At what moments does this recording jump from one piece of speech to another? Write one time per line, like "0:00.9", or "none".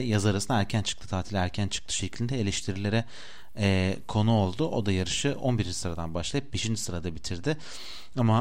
none